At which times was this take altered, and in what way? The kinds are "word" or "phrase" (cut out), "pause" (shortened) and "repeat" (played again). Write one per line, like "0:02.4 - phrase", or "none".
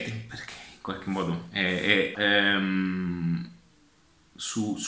0:02.1 - phrase